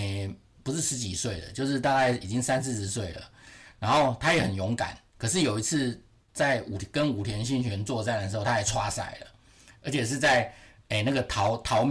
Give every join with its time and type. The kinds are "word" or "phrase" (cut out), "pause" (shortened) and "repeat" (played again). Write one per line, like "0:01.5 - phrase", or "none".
none